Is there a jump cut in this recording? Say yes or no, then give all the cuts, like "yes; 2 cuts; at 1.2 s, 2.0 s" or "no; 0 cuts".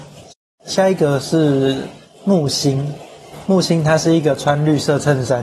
no; 0 cuts